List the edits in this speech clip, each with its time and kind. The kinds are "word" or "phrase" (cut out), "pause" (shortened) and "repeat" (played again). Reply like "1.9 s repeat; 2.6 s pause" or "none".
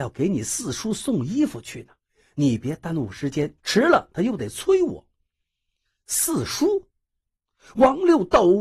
3.6 s pause